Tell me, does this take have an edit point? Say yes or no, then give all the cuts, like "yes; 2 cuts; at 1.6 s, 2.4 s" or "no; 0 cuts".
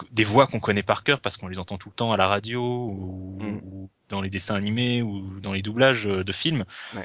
no; 0 cuts